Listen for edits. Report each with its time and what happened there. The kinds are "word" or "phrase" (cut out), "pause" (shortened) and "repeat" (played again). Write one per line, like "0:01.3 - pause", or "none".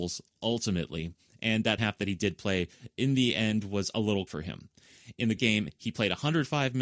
0:01.8 - word
0:04.3 - word
0:05.4 - word